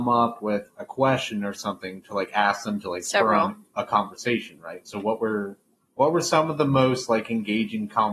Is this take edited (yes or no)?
no